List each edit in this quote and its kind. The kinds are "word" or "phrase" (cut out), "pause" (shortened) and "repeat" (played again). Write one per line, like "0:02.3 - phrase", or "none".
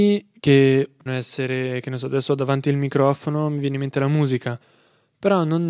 0:01.1 - word